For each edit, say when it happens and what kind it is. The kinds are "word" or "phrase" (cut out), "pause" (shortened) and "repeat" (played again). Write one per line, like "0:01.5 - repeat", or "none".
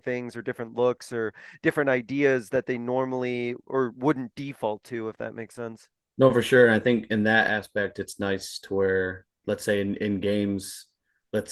none

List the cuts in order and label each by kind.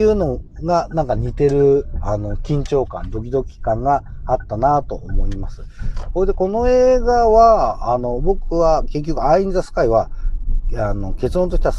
none

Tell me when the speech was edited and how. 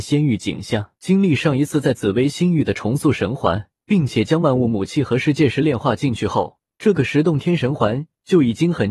0:01.0 - pause
0:03.8 - pause
0:06.7 - pause

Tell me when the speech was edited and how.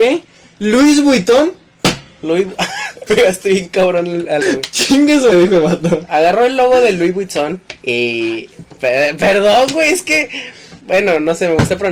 0:03.1 - word
0:04.4 - word
0:05.3 - word
0:10.8 - pause

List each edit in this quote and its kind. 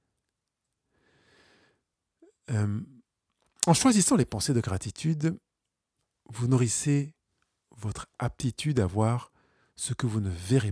none

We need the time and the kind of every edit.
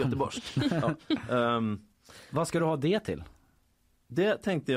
none

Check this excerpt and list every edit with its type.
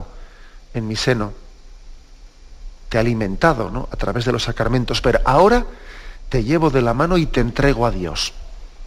none

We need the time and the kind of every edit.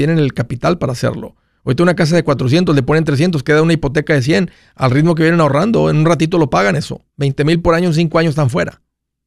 none

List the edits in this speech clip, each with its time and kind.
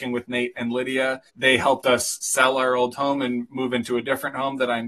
0:01.3 - pause

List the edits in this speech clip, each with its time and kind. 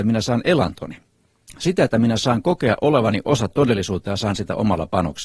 0:01.6 - word
0:03.5 - word
0:04.3 - word

